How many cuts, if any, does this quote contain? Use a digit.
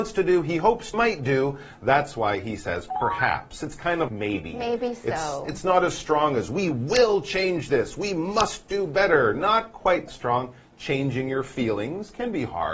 3